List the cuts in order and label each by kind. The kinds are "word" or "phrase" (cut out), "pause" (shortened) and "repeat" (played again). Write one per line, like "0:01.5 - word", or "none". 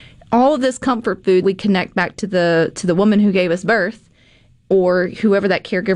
0:01.4 - word